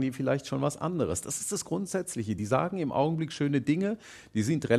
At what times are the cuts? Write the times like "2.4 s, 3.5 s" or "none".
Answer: none